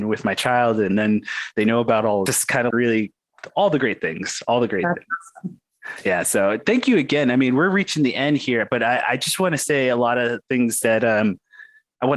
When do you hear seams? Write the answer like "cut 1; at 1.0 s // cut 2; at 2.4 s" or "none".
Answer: cut 1; at 2.3 s // cut 2; at 2.7 s